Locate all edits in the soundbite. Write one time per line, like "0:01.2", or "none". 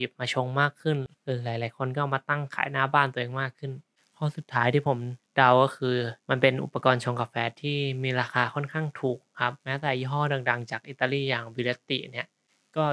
0:01.1
0:05.2
0:06.2
0:09.6